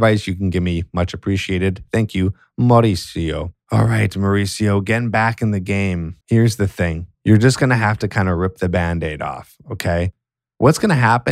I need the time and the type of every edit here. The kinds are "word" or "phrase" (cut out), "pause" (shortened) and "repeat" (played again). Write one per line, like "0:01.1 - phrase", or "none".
0:03.6 - pause
0:06.2 - pause
0:07.1 - pause